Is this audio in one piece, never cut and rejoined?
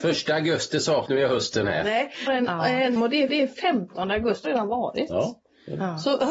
no; 5 cuts; at 1.1 s, 2.3 s, 3.0 s, 3.3 s, 4.4 s

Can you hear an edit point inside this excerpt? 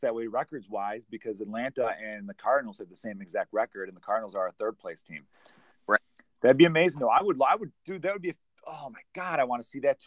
no; 0 cuts

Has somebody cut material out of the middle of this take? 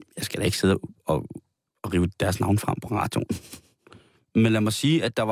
no; 0 cuts

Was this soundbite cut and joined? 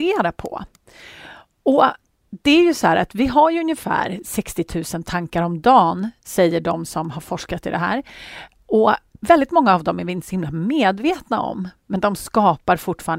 no; 0 cuts

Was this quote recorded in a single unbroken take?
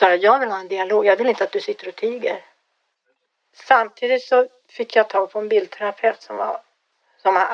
yes; 0 cuts

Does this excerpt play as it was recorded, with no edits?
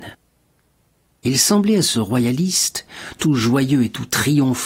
no; 1 cut; at 1.9 s

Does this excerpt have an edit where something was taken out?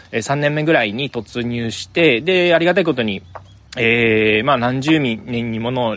no; 0 cuts

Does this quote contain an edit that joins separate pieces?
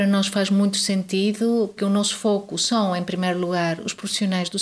yes; 1 cut; at 1.8 s

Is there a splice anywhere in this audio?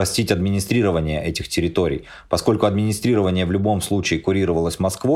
no; 0 cuts

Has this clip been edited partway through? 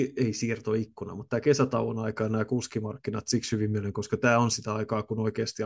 no; 0 cuts

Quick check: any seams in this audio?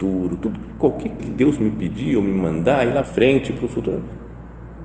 yes; 2 cuts; at 1.2 s, 3.0 s

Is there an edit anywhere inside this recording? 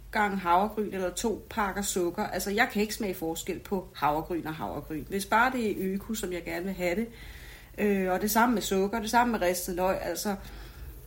no; 0 cuts

